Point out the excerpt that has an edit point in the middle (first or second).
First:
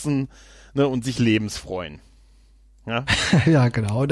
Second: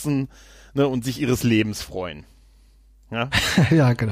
first